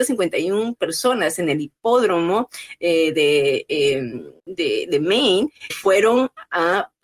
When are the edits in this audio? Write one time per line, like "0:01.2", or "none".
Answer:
0:04.4
0:05.7